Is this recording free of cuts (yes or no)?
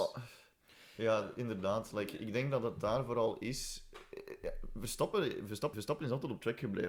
no